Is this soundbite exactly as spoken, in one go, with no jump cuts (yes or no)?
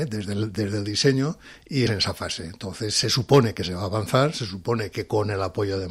no